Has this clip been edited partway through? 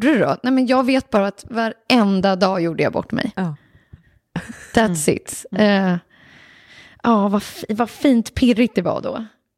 no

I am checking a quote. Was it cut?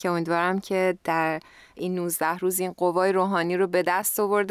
no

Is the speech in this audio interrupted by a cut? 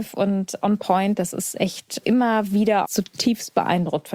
yes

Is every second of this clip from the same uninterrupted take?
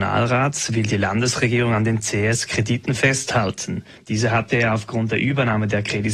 yes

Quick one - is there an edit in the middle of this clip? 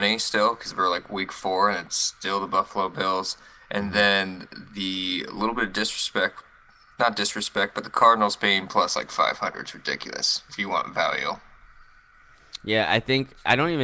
no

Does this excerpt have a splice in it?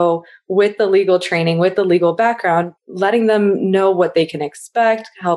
yes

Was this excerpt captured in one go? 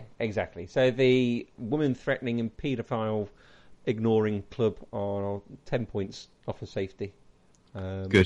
no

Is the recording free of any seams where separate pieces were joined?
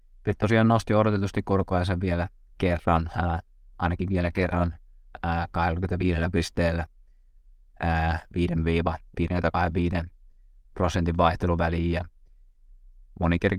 yes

